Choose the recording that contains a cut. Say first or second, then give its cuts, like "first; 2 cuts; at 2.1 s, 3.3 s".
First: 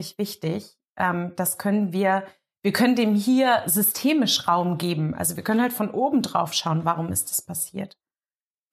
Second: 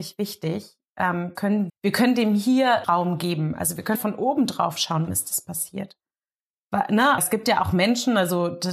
second; 6 cuts; at 1.4 s, 1.7 s, 2.8 s, 3.9 s, 5.1 s, 7.2 s